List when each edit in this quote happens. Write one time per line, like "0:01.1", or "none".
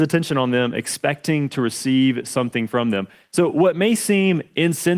none